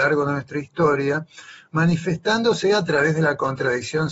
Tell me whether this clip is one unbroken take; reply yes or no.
yes